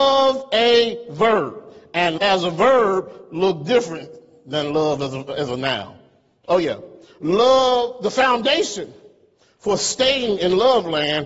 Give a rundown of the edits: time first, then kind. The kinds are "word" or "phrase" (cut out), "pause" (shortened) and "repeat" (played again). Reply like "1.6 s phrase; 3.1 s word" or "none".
2.2 s word